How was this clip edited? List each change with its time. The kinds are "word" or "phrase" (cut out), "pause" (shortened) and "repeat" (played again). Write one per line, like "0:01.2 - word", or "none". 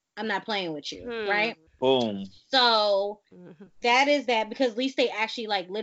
0:01.7 - pause
0:03.3 - pause